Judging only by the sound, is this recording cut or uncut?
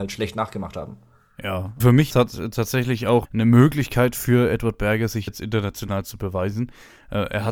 cut